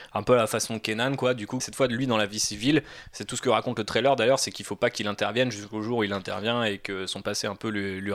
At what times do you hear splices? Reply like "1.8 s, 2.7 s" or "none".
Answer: 1.6 s